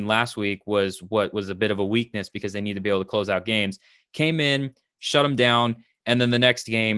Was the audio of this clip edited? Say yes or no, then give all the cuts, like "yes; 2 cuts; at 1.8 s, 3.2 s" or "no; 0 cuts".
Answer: no; 0 cuts